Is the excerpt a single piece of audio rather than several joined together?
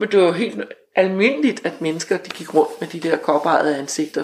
yes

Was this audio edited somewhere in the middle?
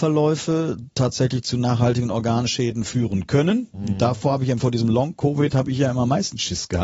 no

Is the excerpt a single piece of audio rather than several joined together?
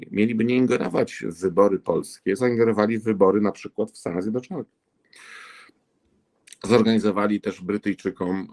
no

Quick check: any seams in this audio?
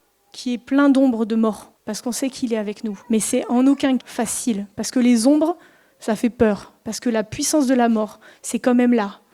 yes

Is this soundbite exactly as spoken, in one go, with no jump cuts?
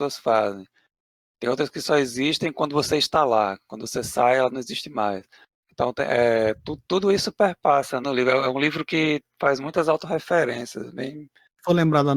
no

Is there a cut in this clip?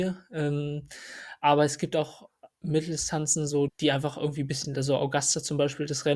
yes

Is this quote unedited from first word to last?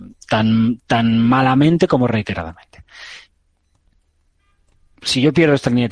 yes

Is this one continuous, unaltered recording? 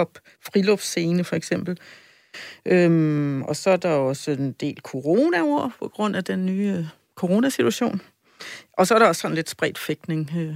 yes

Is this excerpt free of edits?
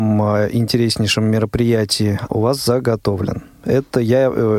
no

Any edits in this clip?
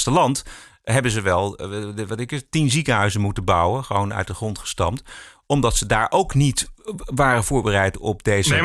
no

